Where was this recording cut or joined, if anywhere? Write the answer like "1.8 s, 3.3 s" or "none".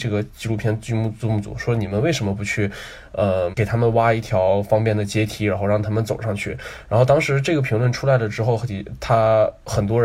3.5 s